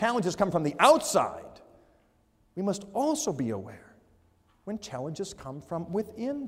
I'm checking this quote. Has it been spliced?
no; 0 cuts

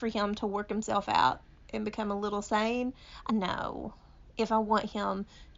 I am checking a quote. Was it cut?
yes; 1 cut; at 3.3 s

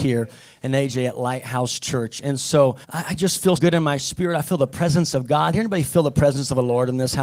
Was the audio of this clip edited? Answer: yes; 2 cuts; at 2.8 s, 3.6 s

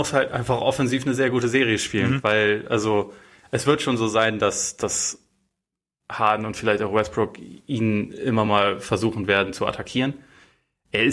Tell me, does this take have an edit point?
no; 0 cuts

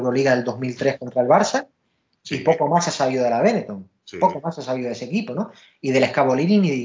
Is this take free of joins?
yes; 0 cuts

